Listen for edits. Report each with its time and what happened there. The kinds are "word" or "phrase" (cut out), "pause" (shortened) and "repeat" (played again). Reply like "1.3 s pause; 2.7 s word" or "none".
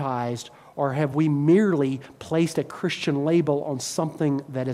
none